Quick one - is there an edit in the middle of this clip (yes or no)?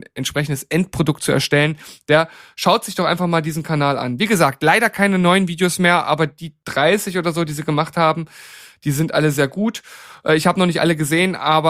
no